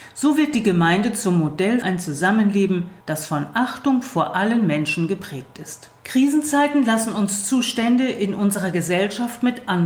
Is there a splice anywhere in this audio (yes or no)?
yes